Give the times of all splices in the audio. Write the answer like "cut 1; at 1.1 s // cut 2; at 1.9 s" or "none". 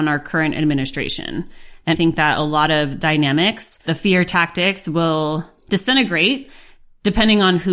cut 1; at 1.9 s // cut 2; at 3.0 s // cut 3; at 3.8 s

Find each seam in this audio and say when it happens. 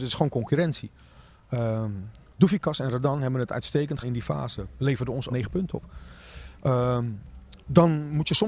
cut 1; at 4.0 s // cut 2; at 5.3 s

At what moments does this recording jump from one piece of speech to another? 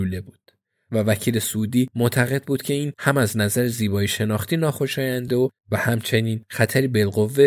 none

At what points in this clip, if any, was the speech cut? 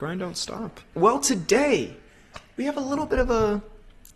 none

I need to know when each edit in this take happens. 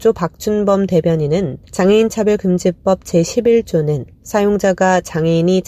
cut 1; at 1.6 s

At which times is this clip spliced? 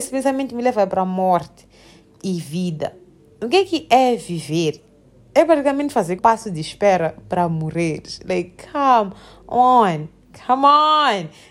cut 1; at 6.2 s

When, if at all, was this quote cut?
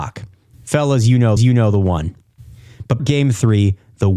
cut 1; at 1.4 s // cut 2; at 3.0 s

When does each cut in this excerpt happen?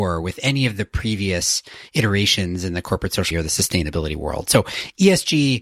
cut 1; at 3.3 s

